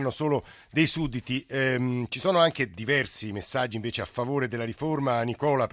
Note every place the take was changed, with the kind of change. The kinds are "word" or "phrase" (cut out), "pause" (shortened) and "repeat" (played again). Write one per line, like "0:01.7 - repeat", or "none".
none